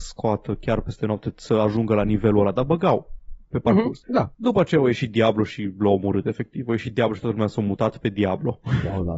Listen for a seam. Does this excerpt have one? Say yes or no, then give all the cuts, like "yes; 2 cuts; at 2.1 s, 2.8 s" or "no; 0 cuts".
no; 0 cuts